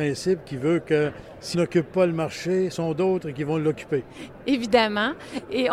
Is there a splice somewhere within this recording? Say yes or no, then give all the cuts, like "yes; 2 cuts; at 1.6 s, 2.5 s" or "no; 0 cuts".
yes; 2 cuts; at 1.5 s, 2.7 s